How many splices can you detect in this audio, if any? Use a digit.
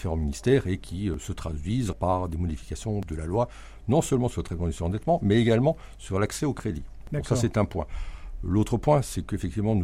1